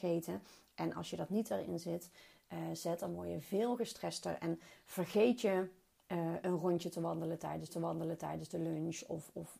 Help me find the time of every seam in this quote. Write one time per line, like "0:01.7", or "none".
0:06.4
0:07.7